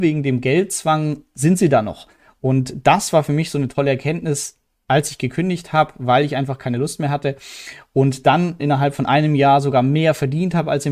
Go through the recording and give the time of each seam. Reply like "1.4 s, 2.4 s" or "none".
8.6 s